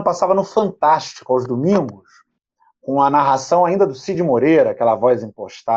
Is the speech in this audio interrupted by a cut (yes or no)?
no